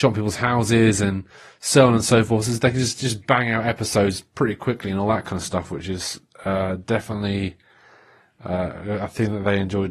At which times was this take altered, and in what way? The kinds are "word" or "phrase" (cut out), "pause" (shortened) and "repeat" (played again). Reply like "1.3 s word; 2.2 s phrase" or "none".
none